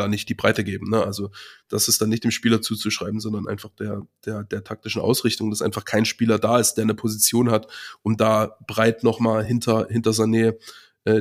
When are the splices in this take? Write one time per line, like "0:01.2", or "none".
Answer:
none